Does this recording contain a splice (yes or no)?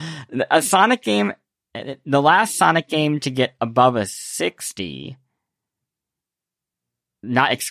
no